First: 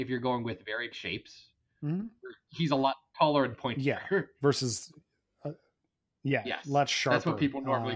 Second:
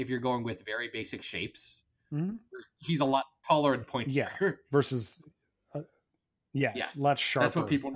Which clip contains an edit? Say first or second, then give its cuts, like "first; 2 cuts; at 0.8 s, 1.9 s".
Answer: first; 1 cut; at 0.9 s